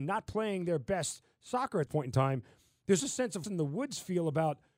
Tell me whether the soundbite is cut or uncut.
cut